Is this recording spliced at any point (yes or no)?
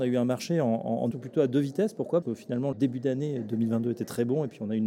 yes